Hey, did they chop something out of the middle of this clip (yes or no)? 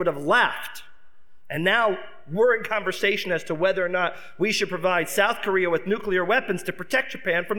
no